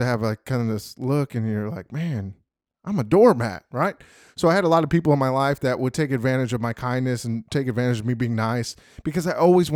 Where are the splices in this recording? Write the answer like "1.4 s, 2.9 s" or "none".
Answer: none